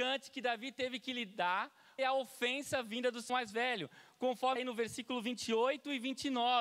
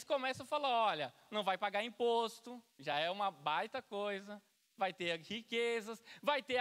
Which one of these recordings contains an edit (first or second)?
first